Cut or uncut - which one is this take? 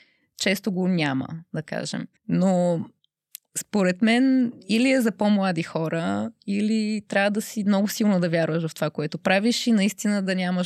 cut